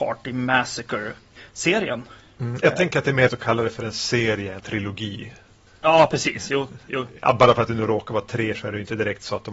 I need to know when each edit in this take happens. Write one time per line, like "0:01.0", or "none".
0:02.6
0:03.3
0:04.6
0:08.5